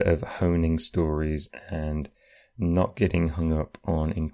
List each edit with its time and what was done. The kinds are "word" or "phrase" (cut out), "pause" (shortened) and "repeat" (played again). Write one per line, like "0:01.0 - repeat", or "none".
none